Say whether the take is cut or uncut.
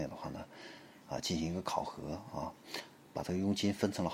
uncut